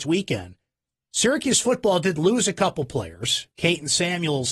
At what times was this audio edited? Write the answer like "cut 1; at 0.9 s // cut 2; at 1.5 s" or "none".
cut 1; at 3.5 s